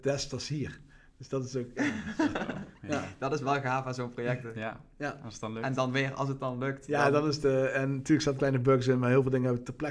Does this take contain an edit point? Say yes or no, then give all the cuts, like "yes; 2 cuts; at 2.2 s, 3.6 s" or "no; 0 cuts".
yes; 1 cut; at 8.4 s